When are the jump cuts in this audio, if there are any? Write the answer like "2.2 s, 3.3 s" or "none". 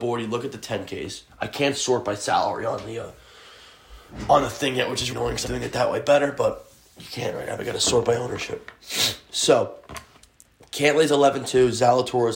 5.1 s, 5.4 s